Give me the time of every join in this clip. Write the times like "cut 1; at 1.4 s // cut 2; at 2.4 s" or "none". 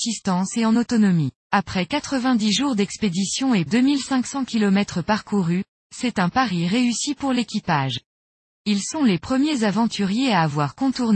cut 1; at 1.4 s // cut 2; at 3.7 s